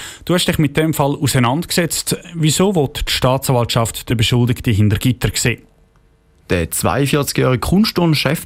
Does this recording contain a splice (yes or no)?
no